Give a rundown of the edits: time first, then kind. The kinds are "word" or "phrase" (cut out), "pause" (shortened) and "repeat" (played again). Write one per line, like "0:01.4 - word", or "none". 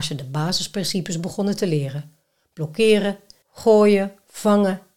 0:03.4 - word